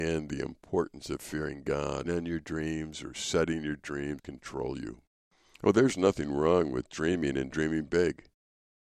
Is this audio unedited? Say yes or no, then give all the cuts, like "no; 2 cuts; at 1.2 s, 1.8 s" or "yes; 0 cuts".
no; 3 cuts; at 2.0 s, 4.2 s, 5.3 s